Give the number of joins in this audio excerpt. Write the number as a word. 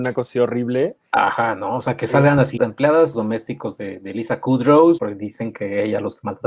three